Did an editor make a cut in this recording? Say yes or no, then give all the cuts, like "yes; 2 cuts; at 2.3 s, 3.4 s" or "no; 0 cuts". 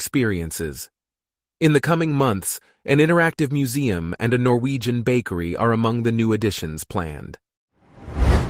no; 0 cuts